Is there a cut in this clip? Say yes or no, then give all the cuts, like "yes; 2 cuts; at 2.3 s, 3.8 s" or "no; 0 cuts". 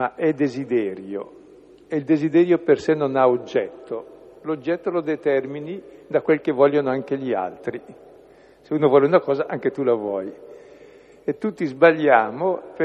no; 0 cuts